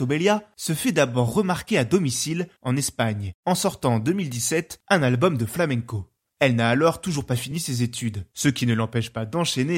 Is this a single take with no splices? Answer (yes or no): yes